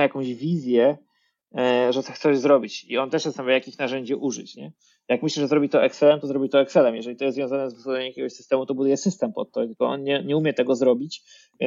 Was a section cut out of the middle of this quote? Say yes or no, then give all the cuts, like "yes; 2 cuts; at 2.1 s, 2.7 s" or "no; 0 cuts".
no; 0 cuts